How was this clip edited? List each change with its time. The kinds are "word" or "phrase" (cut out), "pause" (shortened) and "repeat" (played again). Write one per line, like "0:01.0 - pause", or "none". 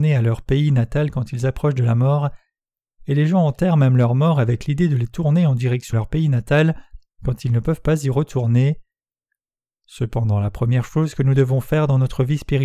0:05.9 - word